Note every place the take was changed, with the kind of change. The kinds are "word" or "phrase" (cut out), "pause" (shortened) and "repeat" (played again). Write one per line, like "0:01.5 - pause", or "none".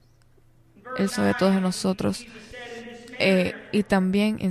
0:01.1 - word